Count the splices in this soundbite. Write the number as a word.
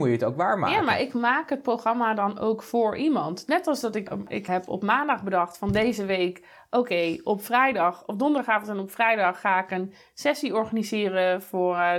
zero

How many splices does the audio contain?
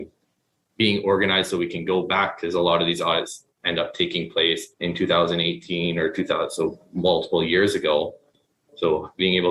one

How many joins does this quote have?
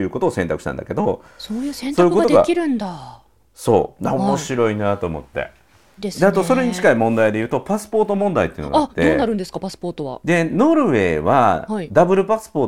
one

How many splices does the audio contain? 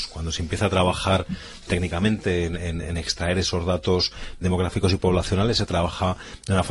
three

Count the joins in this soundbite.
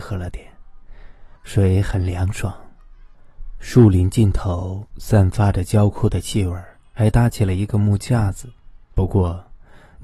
four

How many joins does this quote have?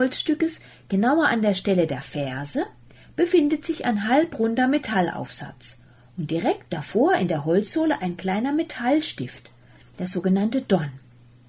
zero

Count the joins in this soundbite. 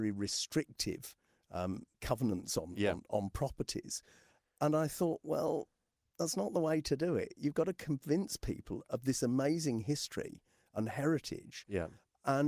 one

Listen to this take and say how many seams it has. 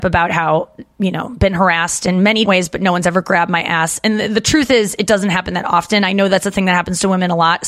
three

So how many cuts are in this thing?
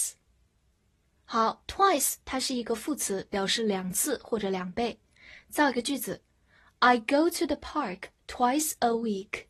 zero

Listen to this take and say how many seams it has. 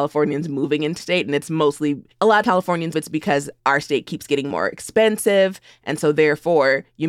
six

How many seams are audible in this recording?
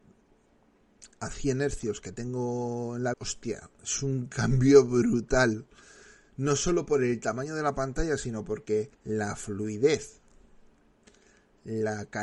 two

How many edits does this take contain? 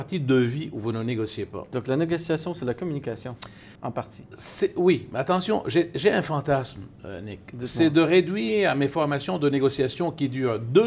one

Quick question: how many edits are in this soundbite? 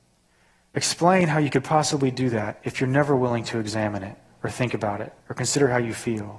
two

